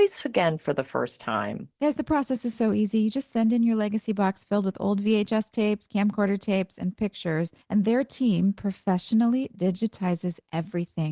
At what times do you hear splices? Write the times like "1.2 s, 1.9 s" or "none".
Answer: 7.6 s